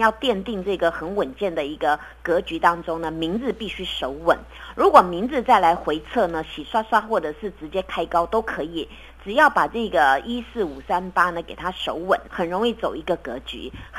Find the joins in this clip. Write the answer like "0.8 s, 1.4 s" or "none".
12.3 s